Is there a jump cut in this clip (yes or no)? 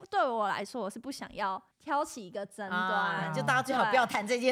yes